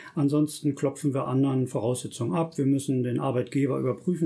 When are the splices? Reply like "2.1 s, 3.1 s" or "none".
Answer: 1.3 s